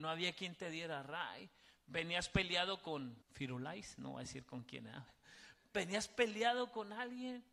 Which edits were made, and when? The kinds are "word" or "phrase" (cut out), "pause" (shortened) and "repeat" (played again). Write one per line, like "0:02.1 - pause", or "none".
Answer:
0:03.2 - pause

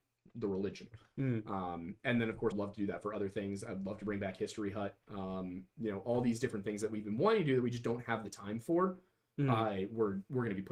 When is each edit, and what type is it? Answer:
0:02.5 - phrase

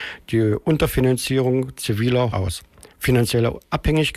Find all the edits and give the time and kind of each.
0:02.3 - word
0:02.9 - pause

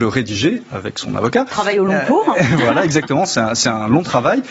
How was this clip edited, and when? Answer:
none

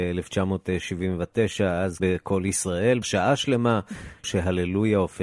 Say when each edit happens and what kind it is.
0:02.0 - word
0:03.0 - word
0:04.2 - word

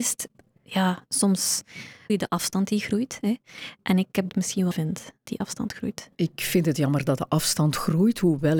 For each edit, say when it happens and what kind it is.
0:02.1 - word
0:04.3 - phrase
0:04.7 - word
0:05.3 - word
0:06.1 - pause

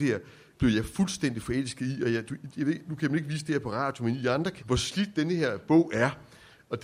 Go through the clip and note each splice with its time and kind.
0:02.8 - word
0:04.6 - word

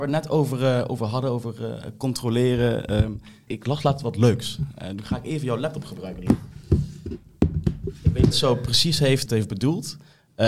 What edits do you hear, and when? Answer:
0:03.5 - word
0:08.3 - phrase
0:09.3 - word

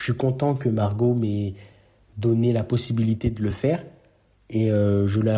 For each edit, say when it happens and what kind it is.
none

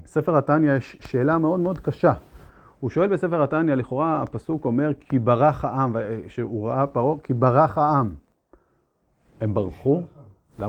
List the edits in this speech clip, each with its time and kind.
none

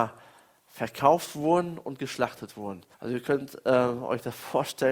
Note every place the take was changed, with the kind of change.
0:02.9 - pause

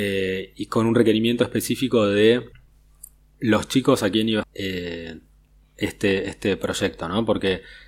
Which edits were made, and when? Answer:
0:04.4 - phrase

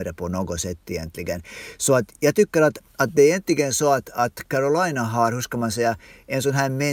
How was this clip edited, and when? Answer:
none

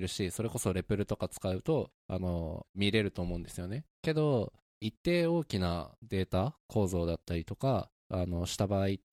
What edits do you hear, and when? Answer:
0:02.7 - phrase
0:03.9 - pause
0:04.7 - phrase

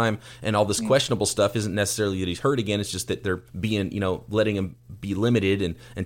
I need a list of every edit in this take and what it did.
0:03.5 - pause

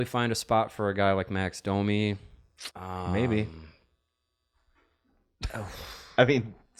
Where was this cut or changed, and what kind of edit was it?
0:02.7 - pause

